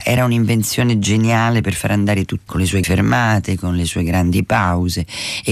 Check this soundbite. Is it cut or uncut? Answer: cut